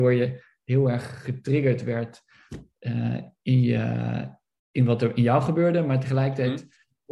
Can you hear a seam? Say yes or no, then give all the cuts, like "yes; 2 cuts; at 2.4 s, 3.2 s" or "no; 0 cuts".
no; 0 cuts